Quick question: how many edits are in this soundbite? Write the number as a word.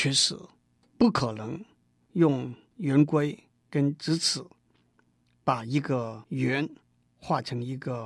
zero